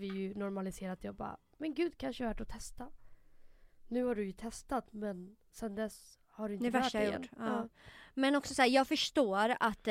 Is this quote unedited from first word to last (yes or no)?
yes